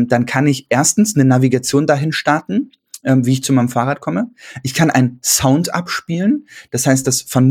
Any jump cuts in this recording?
no; 0 cuts

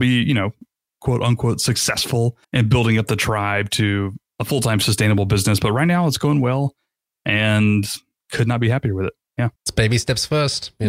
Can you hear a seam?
yes; 2 cuts; at 2.4 s, 9.6 s

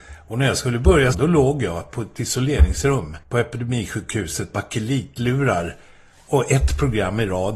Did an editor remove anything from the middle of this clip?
yes; 3 cuts; at 1.1 s, 3.2 s, 4.5 s

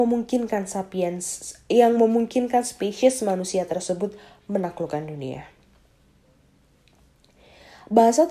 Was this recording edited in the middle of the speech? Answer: no; 0 cuts

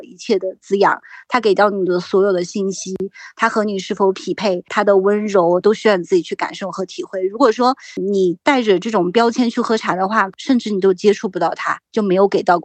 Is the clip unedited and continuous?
no; 1 cut; at 5.6 s

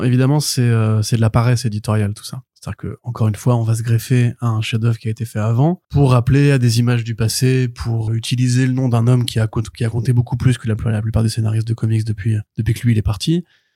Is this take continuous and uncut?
no; 4 cuts; at 2.5 s, 5.8 s, 8.1 s, 12.5 s

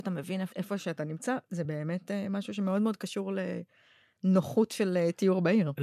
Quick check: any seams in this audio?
no; 0 cuts

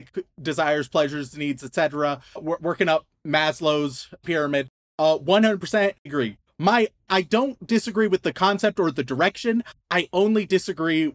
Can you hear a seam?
yes; 4 cuts; at 2.4 s, 4.2 s, 6.1 s, 7.1 s

